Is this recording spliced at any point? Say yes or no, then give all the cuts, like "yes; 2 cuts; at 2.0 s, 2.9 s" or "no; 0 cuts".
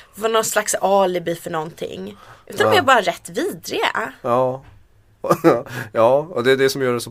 no; 0 cuts